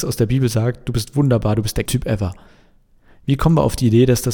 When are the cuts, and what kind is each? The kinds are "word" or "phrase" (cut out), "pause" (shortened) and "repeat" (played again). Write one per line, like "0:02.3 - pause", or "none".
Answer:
0:01.9 - word